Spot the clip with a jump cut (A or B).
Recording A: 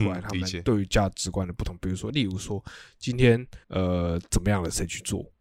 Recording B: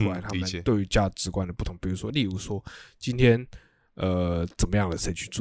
A